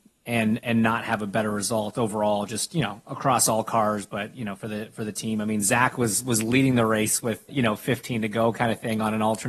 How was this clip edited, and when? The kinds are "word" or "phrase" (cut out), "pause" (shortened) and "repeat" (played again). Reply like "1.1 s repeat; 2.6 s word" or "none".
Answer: 7.5 s word